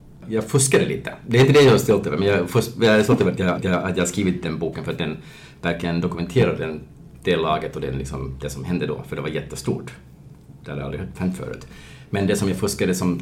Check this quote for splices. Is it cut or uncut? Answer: cut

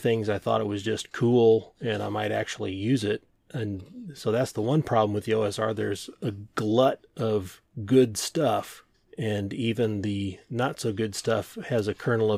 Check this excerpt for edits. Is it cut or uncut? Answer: cut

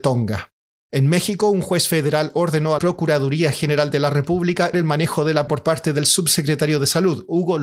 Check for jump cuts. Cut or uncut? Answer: cut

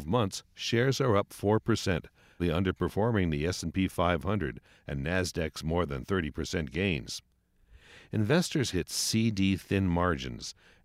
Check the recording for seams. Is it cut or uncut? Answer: cut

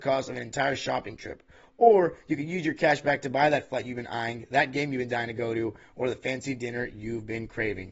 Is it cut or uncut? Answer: uncut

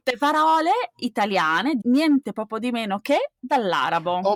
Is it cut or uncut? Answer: cut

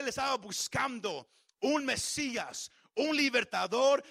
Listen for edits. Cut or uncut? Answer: uncut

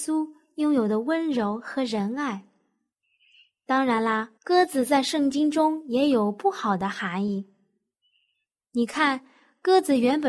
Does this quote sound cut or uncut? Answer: cut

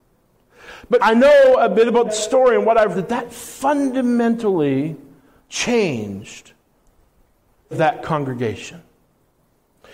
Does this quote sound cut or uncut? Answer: cut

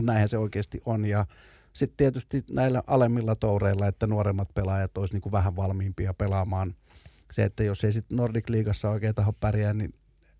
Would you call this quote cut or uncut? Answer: uncut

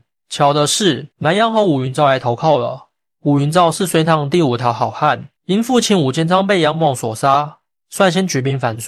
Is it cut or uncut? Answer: cut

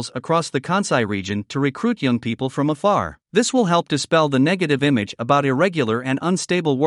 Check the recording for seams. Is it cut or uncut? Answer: cut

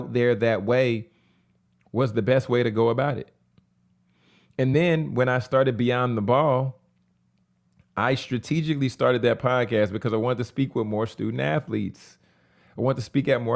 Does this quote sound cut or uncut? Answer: uncut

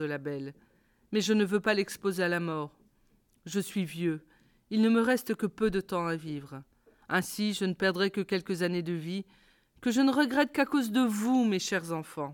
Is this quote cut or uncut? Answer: uncut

